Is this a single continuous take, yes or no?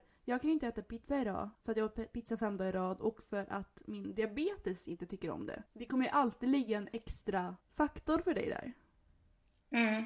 no